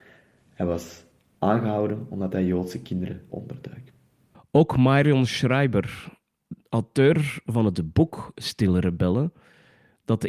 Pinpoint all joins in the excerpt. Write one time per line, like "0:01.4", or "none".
0:03.3